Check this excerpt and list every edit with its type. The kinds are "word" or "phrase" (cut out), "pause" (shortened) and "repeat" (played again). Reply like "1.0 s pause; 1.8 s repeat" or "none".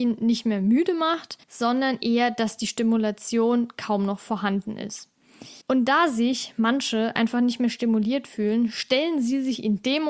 1.4 s pause; 5.6 s pause